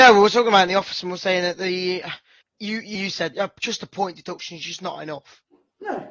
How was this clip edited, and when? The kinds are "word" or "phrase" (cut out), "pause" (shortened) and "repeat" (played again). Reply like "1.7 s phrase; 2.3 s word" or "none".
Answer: 2.4 s pause; 3.0 s word; 3.3 s word